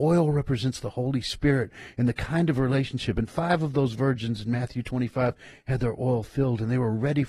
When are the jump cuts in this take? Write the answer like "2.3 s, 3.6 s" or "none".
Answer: none